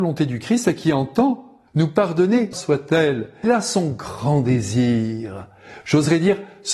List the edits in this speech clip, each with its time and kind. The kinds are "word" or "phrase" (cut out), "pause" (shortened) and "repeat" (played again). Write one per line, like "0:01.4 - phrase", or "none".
0:01.7 - pause
0:02.5 - phrase
0:03.4 - word